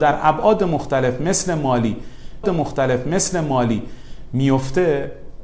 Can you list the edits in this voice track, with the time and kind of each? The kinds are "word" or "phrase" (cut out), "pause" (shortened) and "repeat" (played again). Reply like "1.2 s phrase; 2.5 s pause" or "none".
2.4 s repeat